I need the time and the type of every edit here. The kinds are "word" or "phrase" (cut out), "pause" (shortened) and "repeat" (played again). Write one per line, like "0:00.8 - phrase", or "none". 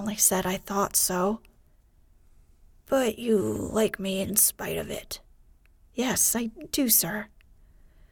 none